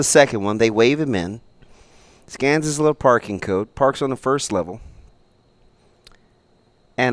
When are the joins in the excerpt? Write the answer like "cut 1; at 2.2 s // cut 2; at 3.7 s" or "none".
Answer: none

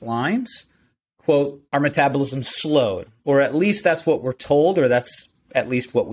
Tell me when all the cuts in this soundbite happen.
cut 1; at 1.7 s // cut 2; at 3.2 s

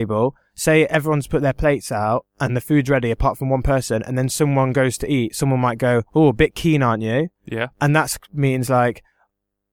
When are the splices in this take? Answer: cut 1; at 7.3 s

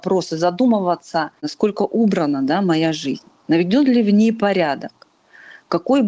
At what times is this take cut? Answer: cut 1; at 1.4 s

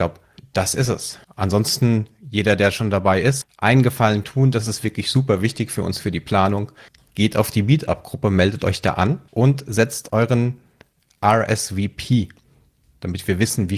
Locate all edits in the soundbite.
cut 1; at 1.2 s // cut 2; at 3.4 s // cut 3; at 4.2 s // cut 4; at 6.9 s // cut 5; at 9.3 s // cut 6; at 10.1 s

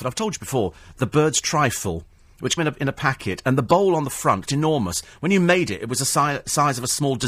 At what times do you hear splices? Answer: cut 1; at 2.6 s // cut 2; at 4.4 s

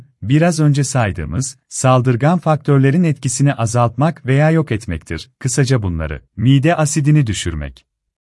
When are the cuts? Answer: cut 1; at 6.3 s

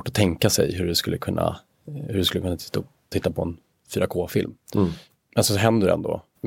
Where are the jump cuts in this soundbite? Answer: cut 1; at 3.1 s

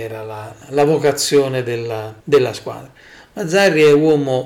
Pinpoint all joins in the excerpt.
cut 1; at 2.2 s

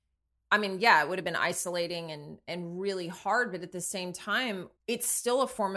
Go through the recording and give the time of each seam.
cut 1; at 4.8 s

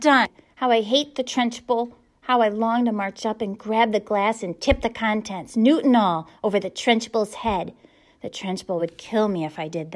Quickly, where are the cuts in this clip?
none

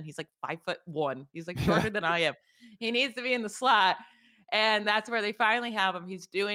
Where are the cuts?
none

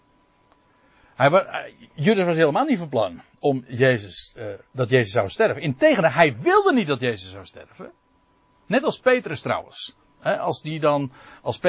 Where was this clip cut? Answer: none

